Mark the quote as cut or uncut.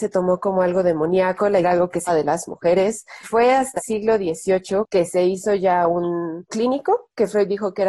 cut